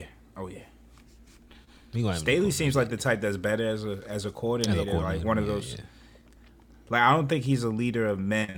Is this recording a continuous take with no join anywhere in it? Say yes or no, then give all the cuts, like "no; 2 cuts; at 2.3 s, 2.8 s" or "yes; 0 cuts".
yes; 0 cuts